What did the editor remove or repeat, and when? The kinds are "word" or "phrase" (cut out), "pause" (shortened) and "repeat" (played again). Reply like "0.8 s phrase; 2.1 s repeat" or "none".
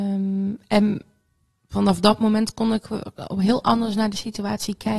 none